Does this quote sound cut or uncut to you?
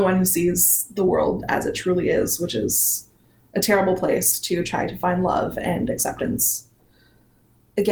uncut